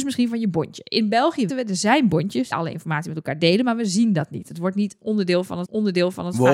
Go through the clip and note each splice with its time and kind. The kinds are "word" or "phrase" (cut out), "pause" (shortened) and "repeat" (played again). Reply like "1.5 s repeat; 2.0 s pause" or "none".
1.5 s word; 2.5 s phrase; 5.6 s repeat